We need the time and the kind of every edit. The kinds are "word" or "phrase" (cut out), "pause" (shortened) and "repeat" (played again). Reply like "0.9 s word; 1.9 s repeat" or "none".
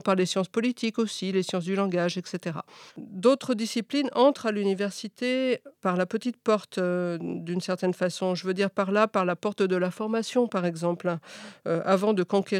2.9 s pause; 5.8 s pause